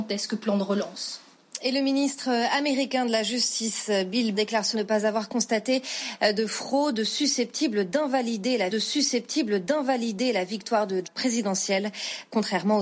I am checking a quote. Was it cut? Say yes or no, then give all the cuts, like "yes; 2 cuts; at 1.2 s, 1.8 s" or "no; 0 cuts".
yes; 4 cuts; at 4.3 s, 4.7 s, 8.7 s, 11.0 s